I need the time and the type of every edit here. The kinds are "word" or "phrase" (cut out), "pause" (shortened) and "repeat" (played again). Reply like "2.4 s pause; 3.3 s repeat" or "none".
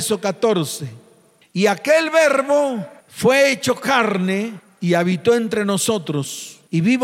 none